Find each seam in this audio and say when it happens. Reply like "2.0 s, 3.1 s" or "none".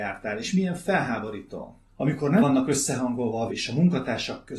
1.9 s, 2.4 s, 3.5 s

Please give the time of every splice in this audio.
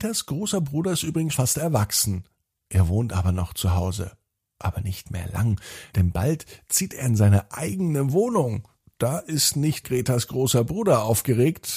1.3 s, 5.9 s, 8.8 s, 9.8 s

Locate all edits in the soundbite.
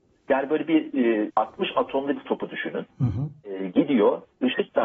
1.3 s, 2.2 s, 3.4 s

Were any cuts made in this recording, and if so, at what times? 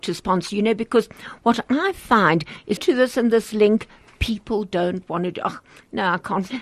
2.8 s

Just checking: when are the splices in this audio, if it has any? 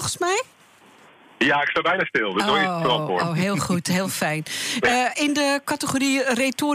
none

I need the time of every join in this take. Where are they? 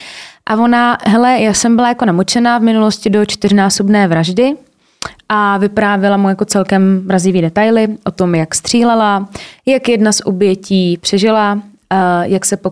none

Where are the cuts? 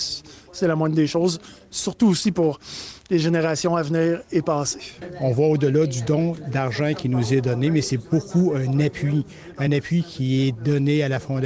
none

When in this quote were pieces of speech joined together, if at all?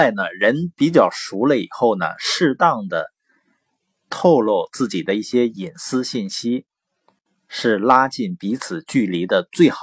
none

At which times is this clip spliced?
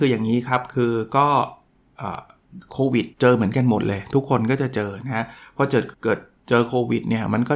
3.1 s, 5.9 s

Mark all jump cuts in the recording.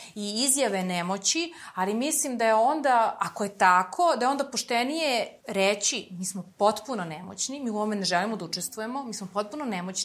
5.4 s

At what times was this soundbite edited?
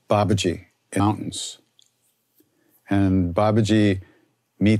1.0 s

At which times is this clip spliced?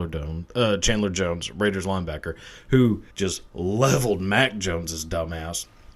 3.1 s

